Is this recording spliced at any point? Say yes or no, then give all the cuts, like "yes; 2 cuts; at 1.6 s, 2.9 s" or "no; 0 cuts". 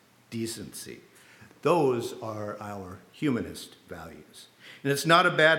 no; 0 cuts